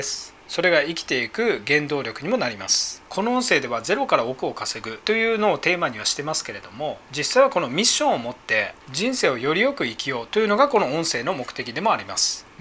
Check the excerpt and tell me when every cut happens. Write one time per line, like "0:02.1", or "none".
0:03.1